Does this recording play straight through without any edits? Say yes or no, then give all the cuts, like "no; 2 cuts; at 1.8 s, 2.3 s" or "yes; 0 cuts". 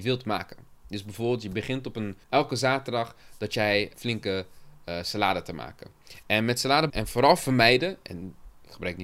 no; 3 cuts; at 2.2 s, 3.9 s, 6.9 s